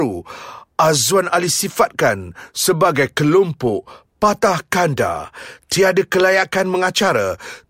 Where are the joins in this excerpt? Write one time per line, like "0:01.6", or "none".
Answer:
none